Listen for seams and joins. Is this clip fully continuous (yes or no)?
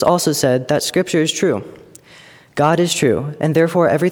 yes